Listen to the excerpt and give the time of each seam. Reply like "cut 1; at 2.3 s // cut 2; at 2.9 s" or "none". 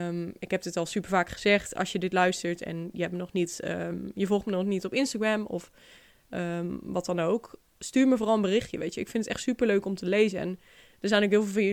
none

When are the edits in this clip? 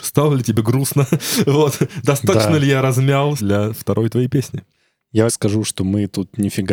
cut 1; at 3.4 s // cut 2; at 5.3 s

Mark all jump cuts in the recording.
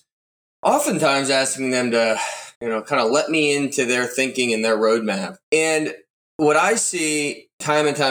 cut 1; at 2.5 s // cut 2; at 5.4 s

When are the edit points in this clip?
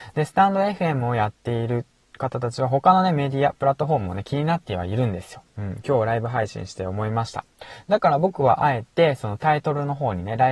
none

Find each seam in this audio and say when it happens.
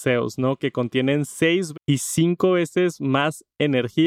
cut 1; at 1.7 s

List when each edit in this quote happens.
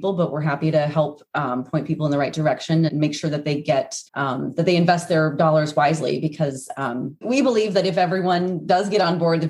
cut 1; at 2.9 s // cut 2; at 4.1 s // cut 3; at 7.2 s

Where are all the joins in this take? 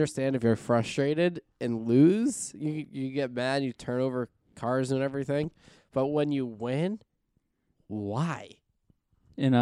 none

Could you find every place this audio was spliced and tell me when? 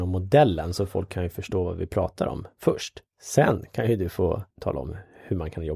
cut 1; at 3.1 s // cut 2; at 4.5 s

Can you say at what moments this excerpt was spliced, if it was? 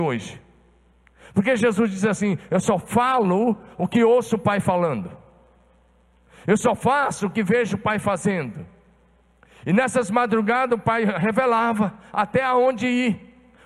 none

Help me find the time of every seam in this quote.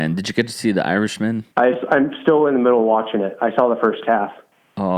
cut 1; at 1.5 s

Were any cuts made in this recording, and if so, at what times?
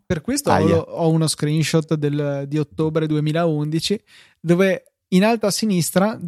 none

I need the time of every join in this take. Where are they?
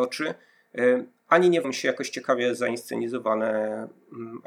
cut 1; at 1.6 s

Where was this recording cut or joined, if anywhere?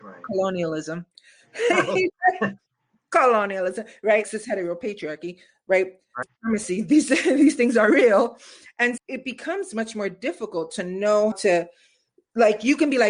cut 1; at 4.2 s // cut 2; at 6.2 s // cut 3; at 9.0 s // cut 4; at 11.3 s

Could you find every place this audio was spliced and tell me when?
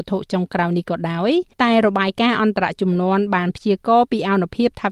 cut 1; at 1.5 s

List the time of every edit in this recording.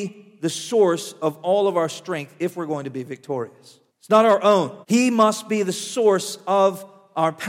cut 1; at 3.9 s // cut 2; at 4.8 s

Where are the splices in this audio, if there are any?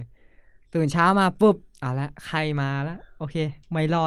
none

